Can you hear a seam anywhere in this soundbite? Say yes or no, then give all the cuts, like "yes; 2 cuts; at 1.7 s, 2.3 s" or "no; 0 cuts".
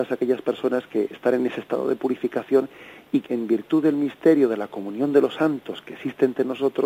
yes; 1 cut; at 3.3 s